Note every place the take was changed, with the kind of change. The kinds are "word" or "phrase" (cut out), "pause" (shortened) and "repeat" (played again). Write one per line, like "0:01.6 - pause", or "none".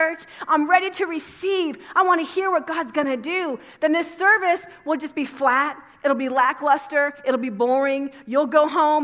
none